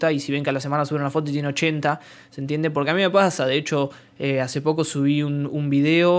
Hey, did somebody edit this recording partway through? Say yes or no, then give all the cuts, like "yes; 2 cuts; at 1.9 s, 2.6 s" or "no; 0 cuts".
no; 0 cuts